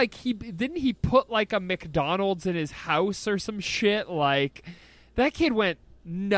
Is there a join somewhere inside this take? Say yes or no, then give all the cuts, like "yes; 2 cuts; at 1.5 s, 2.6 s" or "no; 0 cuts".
no; 0 cuts